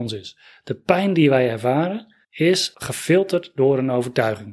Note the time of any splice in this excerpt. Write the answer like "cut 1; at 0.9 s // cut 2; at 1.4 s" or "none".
cut 1; at 2.2 s